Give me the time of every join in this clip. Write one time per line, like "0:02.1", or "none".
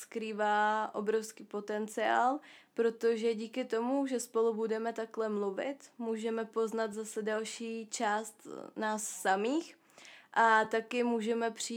none